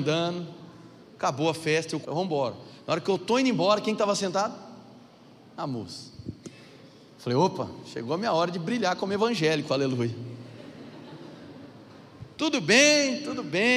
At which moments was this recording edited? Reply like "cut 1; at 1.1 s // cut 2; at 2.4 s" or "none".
cut 1; at 2.0 s